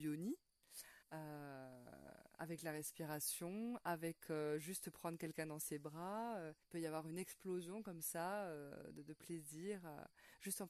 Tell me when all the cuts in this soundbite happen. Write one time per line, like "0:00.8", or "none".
0:01.0
0:06.6